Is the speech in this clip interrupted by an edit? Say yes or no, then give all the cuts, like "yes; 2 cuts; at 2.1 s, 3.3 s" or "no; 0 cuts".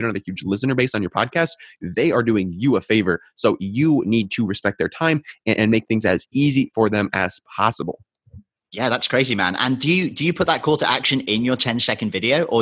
no; 0 cuts